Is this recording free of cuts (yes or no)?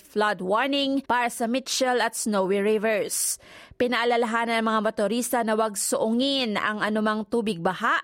no